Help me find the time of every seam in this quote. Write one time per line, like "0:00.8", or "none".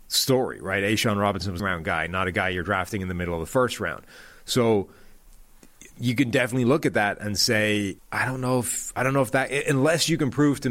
0:01.6
0:05.9
0:08.0